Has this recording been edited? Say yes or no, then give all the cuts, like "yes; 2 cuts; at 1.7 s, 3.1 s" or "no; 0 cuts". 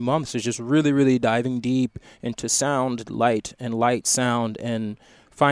no; 0 cuts